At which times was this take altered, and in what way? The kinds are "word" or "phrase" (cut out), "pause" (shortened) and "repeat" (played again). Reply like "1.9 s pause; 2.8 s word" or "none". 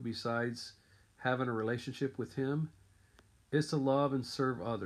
none